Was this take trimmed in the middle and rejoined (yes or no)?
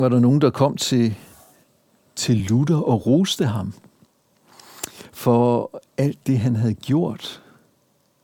no